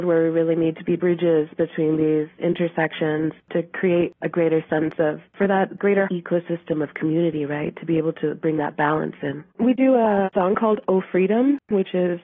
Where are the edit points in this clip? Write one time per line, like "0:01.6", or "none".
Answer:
0:01.0
0:02.4
0:05.3
0:06.1
0:09.5